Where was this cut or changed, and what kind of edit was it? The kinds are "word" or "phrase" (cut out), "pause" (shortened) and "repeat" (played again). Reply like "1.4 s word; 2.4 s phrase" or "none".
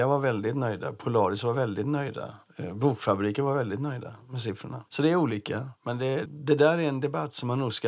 2.4 s pause; 4.9 s pause; 5.8 s pause; 6.3 s word